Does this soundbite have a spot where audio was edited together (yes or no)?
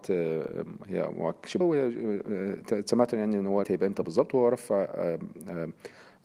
yes